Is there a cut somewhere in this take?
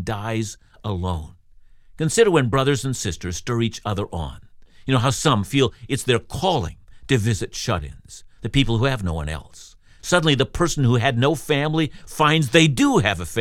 no; 0 cuts

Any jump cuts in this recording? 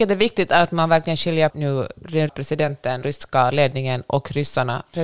yes; 3 cuts; at 1.5 s, 2.3 s, 3.0 s

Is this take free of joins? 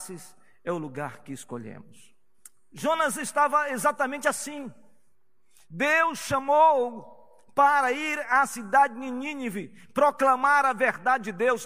yes; 0 cuts

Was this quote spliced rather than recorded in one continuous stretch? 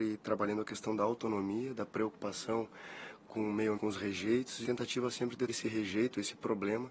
yes; 3 cuts; at 3.7 s, 4.6 s, 5.5 s

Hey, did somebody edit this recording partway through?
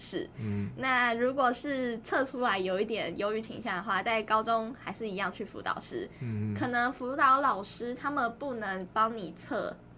no; 0 cuts

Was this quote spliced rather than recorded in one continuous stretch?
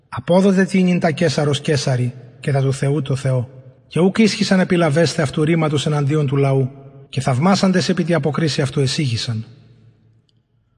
yes; 2 cuts; at 3.8 s, 7.1 s

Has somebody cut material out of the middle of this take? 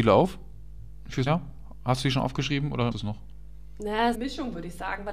yes; 3 cuts; at 1.3 s, 2.9 s, 4.1 s

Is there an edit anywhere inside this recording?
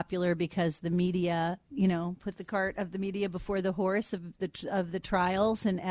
no; 0 cuts

